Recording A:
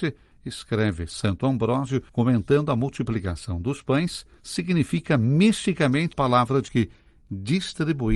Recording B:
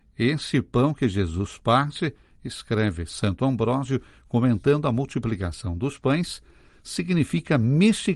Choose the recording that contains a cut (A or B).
A